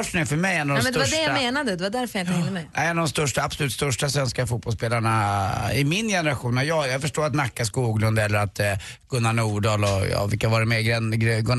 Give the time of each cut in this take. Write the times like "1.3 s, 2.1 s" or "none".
none